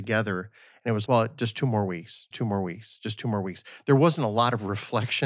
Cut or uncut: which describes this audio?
cut